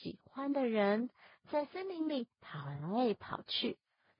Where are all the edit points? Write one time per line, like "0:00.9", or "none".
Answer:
none